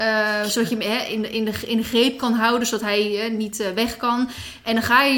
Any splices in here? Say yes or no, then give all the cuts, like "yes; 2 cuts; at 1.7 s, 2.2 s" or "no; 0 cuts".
no; 0 cuts